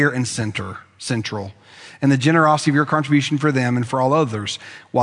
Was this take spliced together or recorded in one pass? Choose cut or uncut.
uncut